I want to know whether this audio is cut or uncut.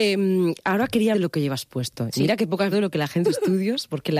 cut